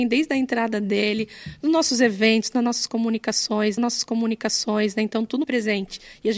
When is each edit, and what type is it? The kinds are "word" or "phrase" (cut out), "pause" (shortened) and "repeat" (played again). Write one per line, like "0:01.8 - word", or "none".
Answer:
0:03.8 - repeat
0:05.4 - word